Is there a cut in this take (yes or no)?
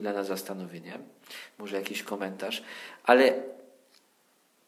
no